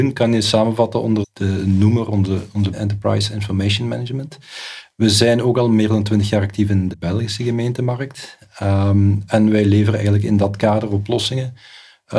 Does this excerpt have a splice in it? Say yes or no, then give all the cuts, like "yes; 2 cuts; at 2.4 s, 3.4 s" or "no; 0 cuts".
yes; 3 cuts; at 1.2 s, 2.7 s, 6.9 s